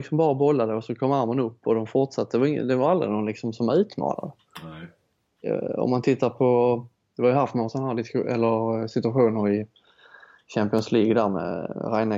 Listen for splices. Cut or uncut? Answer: uncut